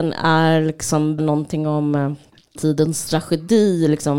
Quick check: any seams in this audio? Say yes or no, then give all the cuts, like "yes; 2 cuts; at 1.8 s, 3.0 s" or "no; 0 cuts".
yes; 2 cuts; at 1.2 s, 2.6 s